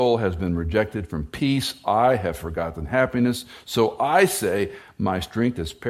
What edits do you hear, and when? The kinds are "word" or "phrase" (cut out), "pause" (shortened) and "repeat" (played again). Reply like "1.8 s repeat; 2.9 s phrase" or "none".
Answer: none